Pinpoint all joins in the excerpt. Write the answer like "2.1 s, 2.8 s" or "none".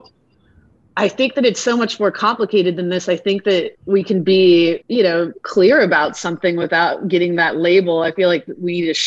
3.8 s, 4.8 s